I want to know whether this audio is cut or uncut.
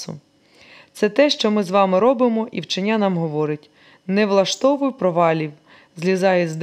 uncut